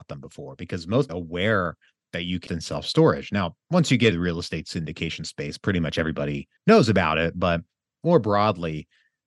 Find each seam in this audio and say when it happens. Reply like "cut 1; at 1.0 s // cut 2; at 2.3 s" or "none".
cut 1; at 1.1 s // cut 2; at 2.5 s // cut 3; at 4.1 s // cut 4; at 6.6 s